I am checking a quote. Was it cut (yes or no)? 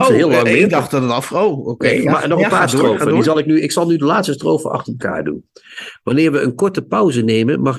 no